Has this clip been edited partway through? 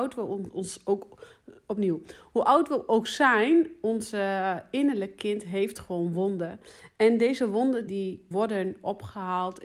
yes; 2 cuts; at 7.9 s, 8.3 s

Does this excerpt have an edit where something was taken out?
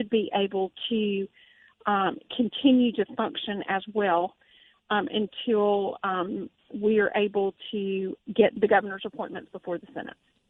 no; 0 cuts

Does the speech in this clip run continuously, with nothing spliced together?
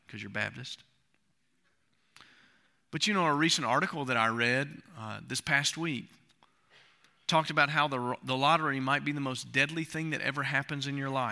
yes; 0 cuts

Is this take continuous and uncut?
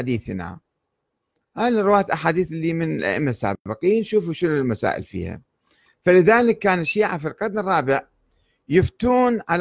yes; 0 cuts

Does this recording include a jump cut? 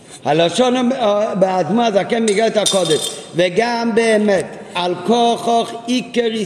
no; 0 cuts

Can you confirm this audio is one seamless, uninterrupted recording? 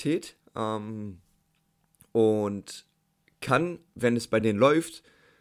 yes; 0 cuts

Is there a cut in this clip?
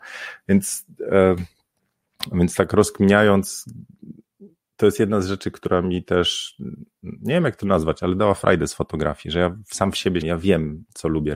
yes; 1 cut; at 10.2 s

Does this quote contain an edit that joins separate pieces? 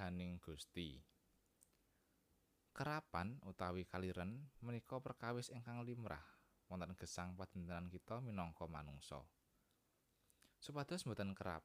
no; 0 cuts

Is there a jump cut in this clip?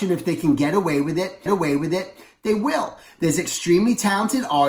yes; 1 cut; at 1.5 s

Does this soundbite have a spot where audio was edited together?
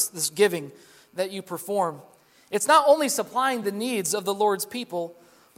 no; 0 cuts

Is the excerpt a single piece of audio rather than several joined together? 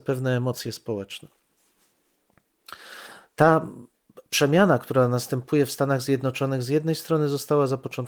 no; 1 cut; at 4.3 s

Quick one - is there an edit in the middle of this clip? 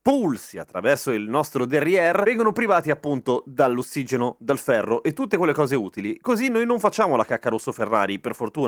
no; 0 cuts

